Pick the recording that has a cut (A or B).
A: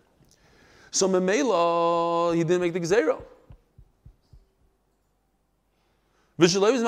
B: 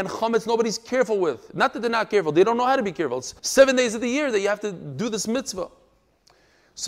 B